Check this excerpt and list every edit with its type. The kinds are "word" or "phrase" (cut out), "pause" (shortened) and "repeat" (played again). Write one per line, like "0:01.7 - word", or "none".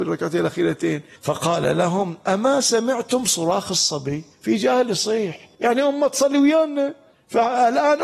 0:01.2 - pause
0:04.3 - pause
0:05.5 - pause
0:07.1 - pause